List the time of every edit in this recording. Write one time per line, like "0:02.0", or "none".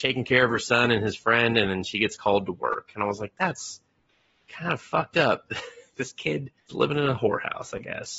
0:06.6